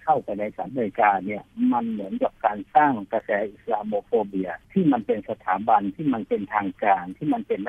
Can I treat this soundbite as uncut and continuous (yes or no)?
no